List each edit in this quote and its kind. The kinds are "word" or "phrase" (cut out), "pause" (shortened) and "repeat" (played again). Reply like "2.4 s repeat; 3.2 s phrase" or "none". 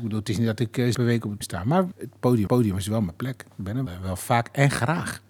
0.9 s phrase; 1.4 s word; 1.9 s word; 2.5 s repeat; 3.9 s word